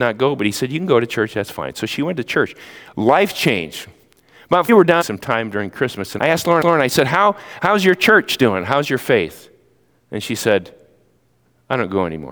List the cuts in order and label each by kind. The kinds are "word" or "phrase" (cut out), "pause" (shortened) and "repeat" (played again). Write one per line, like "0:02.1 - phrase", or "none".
0:04.7 - phrase
0:05.0 - phrase
0:06.2 - word
0:06.6 - repeat